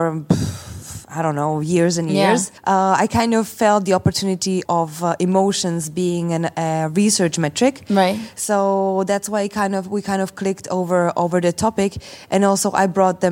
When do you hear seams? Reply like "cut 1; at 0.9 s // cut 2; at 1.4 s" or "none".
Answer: cut 1; at 2.6 s // cut 2; at 4.6 s